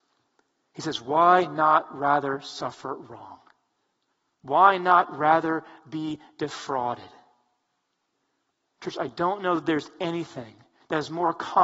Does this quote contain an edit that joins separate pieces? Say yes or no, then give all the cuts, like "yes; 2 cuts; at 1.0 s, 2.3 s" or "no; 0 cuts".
no; 0 cuts